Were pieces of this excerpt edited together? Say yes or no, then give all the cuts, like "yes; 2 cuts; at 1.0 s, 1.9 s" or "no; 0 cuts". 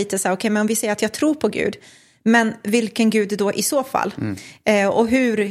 no; 0 cuts